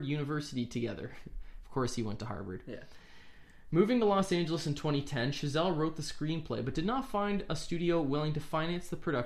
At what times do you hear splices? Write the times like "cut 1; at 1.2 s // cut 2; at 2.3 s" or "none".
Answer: none